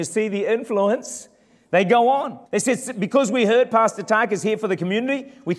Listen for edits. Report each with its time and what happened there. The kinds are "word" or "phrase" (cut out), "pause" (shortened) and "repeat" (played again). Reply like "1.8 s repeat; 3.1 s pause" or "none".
2.5 s pause